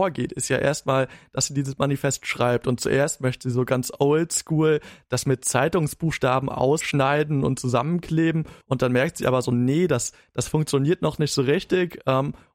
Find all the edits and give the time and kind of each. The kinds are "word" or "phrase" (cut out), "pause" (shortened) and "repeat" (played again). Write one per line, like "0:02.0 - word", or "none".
0:08.6 - pause